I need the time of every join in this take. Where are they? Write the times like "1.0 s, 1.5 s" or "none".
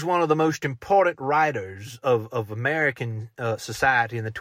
none